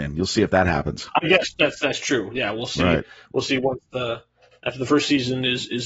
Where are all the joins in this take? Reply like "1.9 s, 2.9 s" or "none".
none